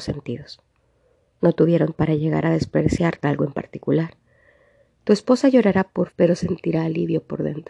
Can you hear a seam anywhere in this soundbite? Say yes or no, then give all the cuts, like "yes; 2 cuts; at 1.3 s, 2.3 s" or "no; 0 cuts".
yes; 3 cuts; at 1.9 s, 3.2 s, 6.1 s